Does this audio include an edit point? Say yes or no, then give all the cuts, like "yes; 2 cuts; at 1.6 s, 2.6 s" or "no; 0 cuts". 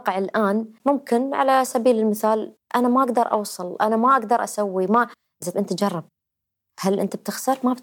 yes; 1 cut; at 5.5 s